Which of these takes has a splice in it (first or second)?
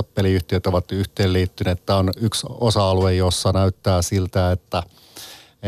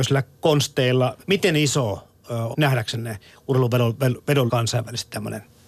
second